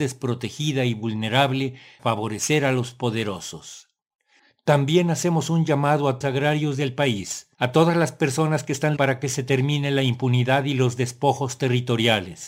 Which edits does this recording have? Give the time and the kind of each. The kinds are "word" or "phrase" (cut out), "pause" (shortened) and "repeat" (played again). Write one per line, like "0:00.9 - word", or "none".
0:02.0 - word
0:06.2 - phrase
0:07.5 - pause
0:09.0 - word